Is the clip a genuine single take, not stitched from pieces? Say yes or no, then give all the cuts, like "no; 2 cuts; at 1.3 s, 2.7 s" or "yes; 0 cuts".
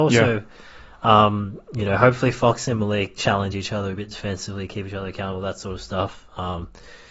yes; 0 cuts